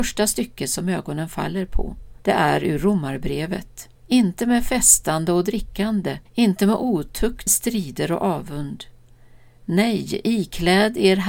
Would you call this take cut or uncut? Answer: cut